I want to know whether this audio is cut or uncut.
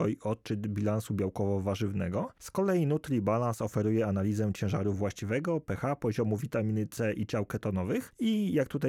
uncut